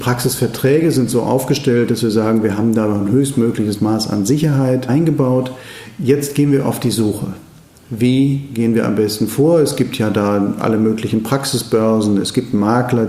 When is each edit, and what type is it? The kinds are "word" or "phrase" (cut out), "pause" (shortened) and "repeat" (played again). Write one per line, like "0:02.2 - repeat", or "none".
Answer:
none